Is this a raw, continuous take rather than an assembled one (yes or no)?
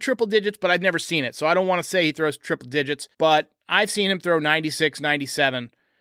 no